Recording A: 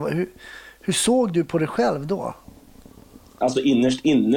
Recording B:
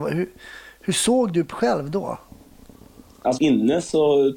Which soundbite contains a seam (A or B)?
B